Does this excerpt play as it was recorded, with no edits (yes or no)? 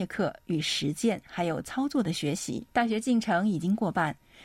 no